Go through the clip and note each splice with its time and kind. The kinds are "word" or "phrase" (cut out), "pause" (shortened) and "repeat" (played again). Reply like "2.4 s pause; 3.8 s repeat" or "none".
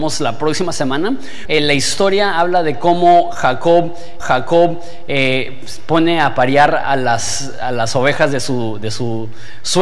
1.4 s word; 4.2 s repeat